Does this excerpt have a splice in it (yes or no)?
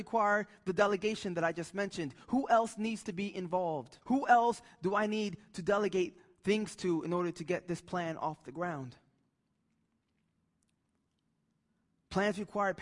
yes